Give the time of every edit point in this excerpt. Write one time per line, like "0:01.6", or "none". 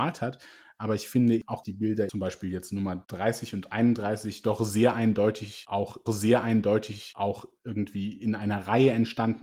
0:01.6
0:06.1